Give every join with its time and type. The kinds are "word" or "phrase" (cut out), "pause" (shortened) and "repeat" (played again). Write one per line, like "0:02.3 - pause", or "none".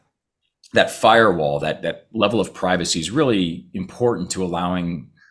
none